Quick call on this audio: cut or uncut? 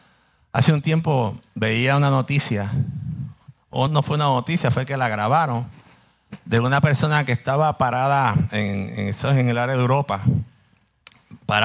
cut